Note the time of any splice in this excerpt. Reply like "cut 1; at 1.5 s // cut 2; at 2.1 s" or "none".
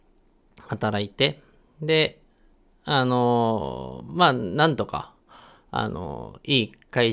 none